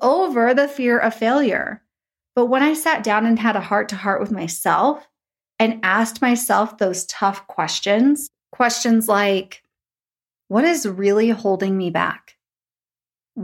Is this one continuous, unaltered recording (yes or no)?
yes